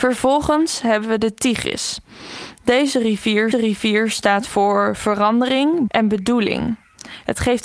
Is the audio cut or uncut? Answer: cut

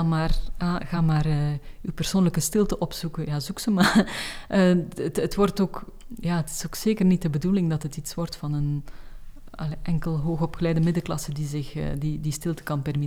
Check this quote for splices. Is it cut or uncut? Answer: uncut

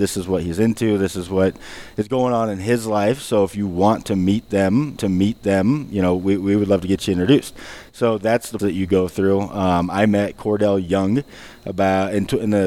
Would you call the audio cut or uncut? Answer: cut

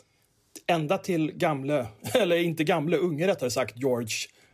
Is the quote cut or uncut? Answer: uncut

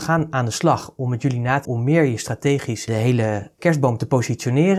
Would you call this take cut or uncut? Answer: cut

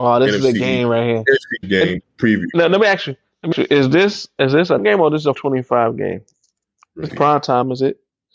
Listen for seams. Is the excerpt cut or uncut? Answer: cut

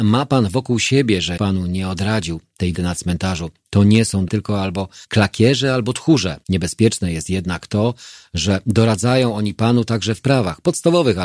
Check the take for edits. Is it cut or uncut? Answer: cut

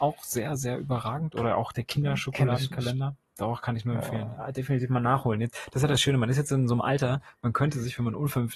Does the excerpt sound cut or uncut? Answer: uncut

